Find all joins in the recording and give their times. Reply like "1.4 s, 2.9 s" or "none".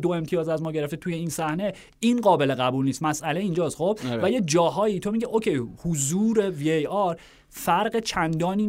none